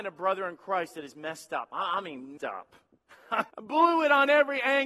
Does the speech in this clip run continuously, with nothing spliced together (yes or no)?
no